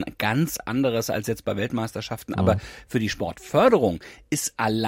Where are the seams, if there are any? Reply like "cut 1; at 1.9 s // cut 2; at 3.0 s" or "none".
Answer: none